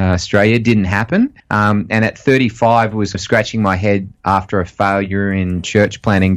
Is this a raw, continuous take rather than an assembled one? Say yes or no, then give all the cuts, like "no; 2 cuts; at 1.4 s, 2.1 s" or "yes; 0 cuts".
no; 2 cuts; at 1.4 s, 3.1 s